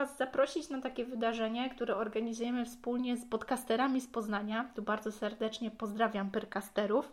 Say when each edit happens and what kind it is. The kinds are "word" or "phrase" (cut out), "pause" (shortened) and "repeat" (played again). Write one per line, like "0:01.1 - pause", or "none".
none